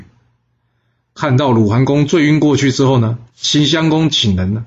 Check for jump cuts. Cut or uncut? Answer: cut